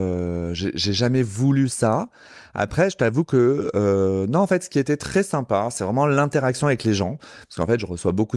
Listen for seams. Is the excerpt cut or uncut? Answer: uncut